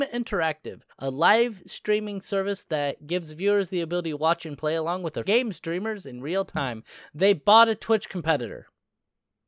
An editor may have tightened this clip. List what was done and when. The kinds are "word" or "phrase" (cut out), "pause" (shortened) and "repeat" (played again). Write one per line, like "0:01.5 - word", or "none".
0:00.9 - pause
0:05.2 - word